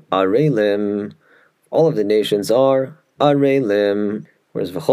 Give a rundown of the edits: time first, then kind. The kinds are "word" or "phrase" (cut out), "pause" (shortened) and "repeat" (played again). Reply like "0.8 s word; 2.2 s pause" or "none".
none